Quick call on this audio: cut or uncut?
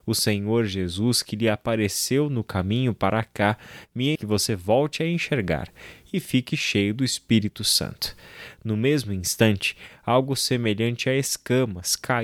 cut